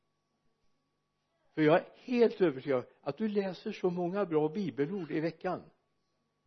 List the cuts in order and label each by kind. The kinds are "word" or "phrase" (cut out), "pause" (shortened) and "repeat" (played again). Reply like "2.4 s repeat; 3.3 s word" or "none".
none